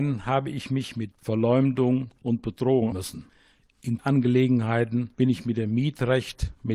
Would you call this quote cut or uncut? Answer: cut